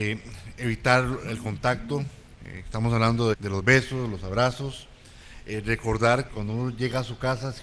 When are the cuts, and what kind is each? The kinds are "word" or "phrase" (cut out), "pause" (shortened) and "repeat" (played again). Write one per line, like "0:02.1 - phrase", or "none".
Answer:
0:03.3 - word
0:06.3 - word